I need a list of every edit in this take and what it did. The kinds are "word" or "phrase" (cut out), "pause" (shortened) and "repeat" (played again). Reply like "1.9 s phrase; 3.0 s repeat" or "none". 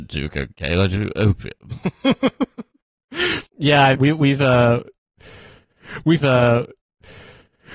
3.5 s pause; 3.9 s word; 6.2 s repeat